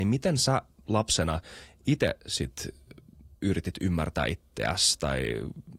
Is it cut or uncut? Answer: cut